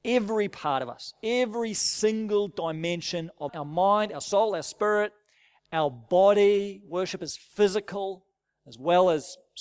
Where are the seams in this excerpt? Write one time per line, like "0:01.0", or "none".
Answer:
0:03.5